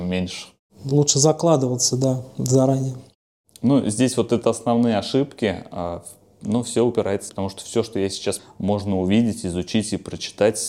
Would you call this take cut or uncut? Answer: cut